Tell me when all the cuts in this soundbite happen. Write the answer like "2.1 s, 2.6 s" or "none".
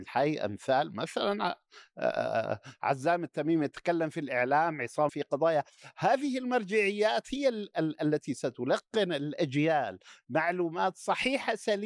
5.1 s